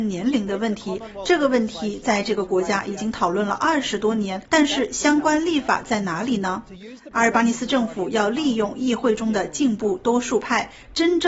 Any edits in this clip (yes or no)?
yes